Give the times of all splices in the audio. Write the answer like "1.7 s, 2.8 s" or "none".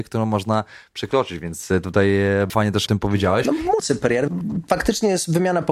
2.5 s, 2.9 s, 3.8 s